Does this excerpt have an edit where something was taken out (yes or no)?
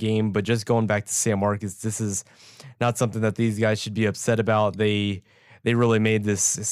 no